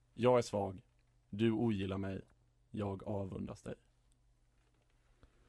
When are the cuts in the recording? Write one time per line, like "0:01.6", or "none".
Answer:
none